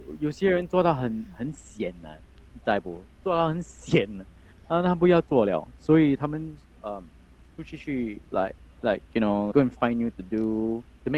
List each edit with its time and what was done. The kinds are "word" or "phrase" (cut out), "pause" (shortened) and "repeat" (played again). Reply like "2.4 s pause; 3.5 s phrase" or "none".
8.3 s pause; 9.5 s word; 10.1 s word